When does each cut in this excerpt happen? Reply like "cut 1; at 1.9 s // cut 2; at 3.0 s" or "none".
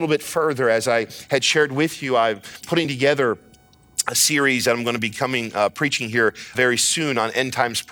cut 1; at 6.5 s